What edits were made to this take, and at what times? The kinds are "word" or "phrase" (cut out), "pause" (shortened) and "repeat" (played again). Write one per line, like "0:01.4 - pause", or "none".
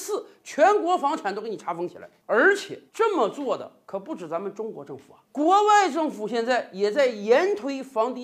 0:02.9 - pause